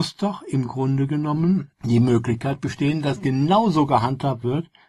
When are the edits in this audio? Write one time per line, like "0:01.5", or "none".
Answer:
0:01.8